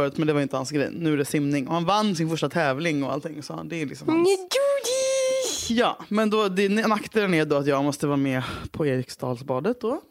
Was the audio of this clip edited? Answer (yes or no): no